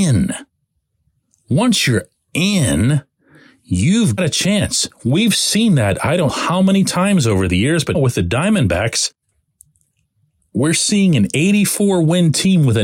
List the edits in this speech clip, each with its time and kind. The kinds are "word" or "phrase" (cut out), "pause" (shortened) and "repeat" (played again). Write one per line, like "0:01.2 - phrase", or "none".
0:04.2 - word
0:06.3 - word
0:07.9 - word